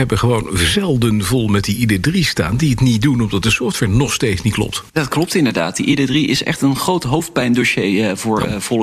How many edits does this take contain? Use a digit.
0